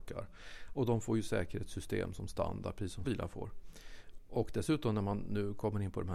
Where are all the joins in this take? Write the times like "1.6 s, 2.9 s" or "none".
3.0 s